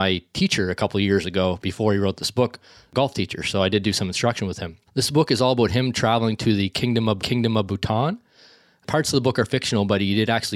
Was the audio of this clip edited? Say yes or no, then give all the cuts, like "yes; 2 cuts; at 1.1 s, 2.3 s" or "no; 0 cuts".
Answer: yes; 2 cuts; at 4.9 s, 7.2 s